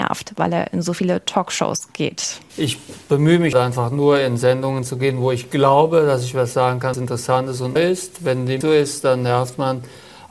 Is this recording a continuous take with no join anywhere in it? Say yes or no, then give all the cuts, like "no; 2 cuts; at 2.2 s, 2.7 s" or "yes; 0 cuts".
no; 4 cuts; at 3.5 s, 6.9 s, 7.8 s, 8.6 s